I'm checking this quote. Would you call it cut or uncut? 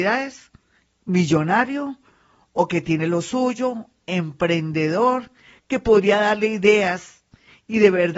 uncut